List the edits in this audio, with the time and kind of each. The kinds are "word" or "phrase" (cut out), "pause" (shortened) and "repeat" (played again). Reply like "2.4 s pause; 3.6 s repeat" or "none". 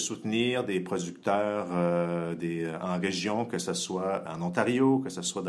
4.3 s word

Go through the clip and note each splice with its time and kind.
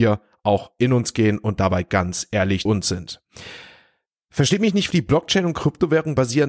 2.7 s word; 4.9 s word

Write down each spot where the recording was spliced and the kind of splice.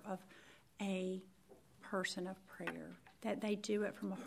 1.8 s word

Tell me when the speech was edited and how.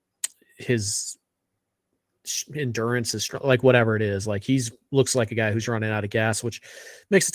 none

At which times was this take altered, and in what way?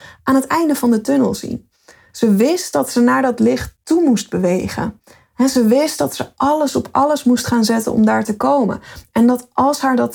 none

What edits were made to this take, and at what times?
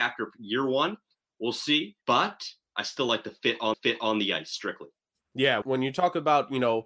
2.0 s pause; 3.7 s repeat; 5.6 s word

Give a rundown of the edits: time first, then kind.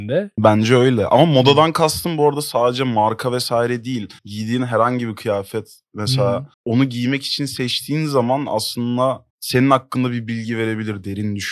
4.2 s pause; 6.5 s pause; 9.3 s pause

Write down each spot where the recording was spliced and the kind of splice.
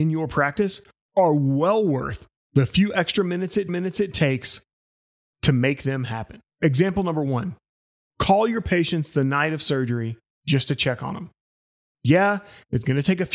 3.7 s repeat

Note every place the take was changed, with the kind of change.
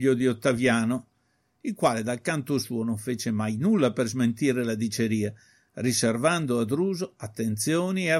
none

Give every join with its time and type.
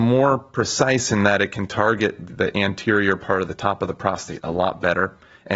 2.3 s word; 3.5 s phrase

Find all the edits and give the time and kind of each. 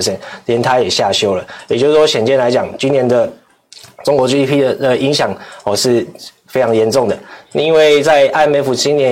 none

